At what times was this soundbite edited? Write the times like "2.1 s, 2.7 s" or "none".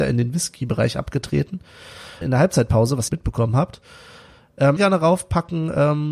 2.2 s, 3.1 s, 4.8 s